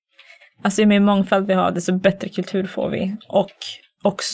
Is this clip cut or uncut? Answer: uncut